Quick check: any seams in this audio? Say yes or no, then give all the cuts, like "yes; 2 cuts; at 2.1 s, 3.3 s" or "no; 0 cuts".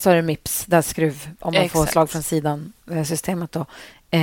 no; 0 cuts